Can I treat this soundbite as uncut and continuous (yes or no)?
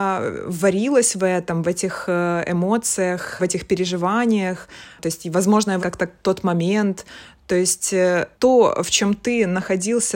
no